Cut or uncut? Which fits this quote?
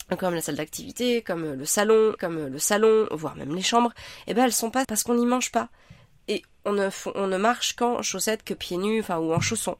cut